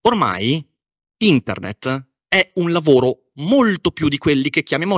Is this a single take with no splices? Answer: yes; 0 cuts

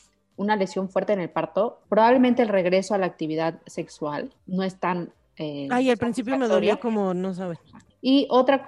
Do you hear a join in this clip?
yes; 1 cut; at 4.4 s

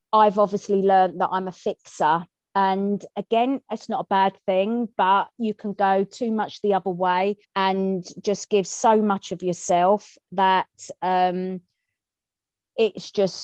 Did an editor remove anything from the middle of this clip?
yes; 2 cuts; at 3.1 s, 7.4 s

